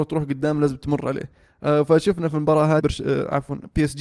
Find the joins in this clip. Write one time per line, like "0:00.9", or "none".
0:02.8